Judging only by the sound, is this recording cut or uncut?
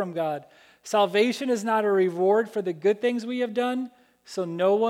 uncut